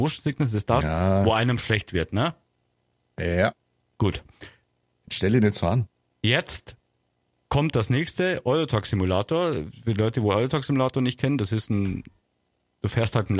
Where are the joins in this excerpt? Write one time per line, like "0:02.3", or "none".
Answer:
none